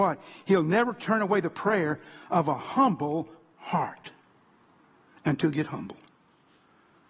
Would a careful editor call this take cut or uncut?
cut